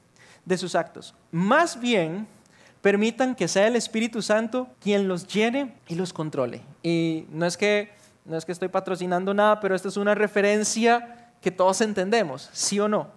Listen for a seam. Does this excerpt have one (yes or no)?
yes